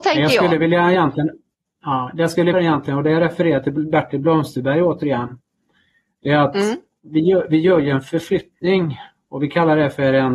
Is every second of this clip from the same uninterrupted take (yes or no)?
no